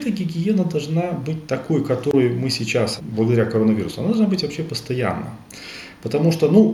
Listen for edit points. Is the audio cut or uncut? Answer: cut